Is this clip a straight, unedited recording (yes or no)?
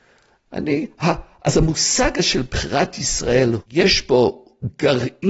yes